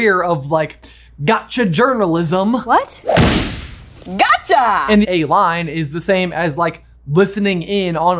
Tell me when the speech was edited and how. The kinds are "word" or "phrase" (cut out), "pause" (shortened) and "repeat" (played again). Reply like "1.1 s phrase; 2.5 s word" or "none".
5.0 s phrase